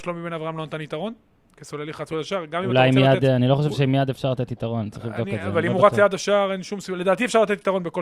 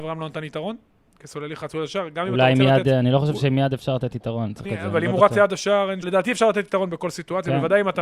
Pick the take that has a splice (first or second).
second